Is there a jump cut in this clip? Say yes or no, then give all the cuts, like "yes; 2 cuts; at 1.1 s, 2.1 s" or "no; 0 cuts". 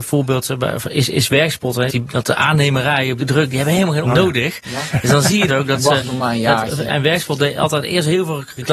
yes; 5 cuts; at 1.9 s, 3.2 s, 4.0 s, 5.5 s, 6.9 s